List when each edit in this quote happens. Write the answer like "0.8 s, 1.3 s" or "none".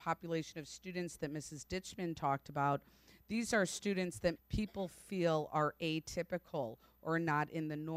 4.4 s